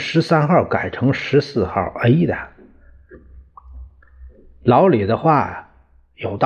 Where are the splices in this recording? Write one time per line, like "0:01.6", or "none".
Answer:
none